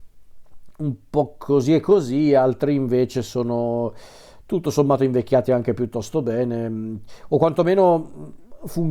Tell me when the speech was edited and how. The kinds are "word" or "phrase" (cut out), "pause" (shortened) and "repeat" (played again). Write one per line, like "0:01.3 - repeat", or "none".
none